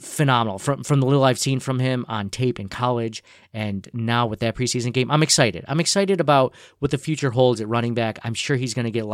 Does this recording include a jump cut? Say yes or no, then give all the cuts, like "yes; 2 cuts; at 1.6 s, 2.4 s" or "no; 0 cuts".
no; 0 cuts